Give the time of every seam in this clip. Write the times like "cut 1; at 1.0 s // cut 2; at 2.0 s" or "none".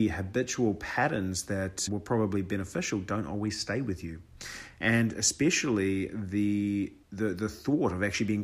cut 1; at 1.9 s // cut 2; at 7.0 s